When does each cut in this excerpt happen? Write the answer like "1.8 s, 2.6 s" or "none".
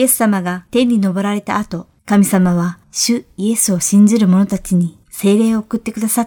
2.0 s, 2.8 s, 5.0 s

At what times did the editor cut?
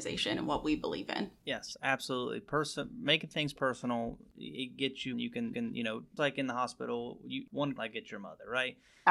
1.4 s, 4.3 s, 5.1 s, 5.5 s, 6.2 s, 7.8 s

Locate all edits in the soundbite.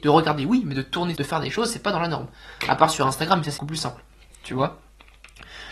1.2 s, 3.6 s

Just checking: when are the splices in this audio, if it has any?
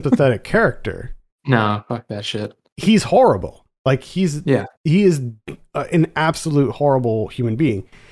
4.8 s

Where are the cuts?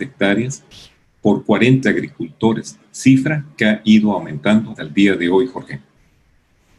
1.8 s, 4.8 s

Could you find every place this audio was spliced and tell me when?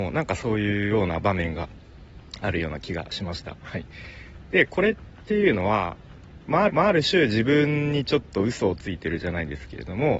6.7 s

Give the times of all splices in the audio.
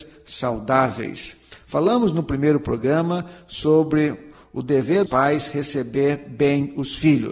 5.1 s

